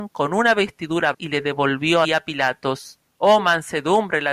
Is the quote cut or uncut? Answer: cut